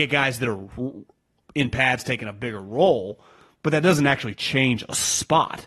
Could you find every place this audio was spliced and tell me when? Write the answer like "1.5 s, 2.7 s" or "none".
none